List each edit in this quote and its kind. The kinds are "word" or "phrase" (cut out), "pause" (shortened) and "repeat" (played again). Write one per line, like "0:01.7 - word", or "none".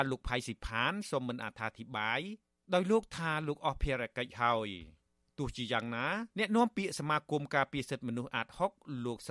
0:06.3 - pause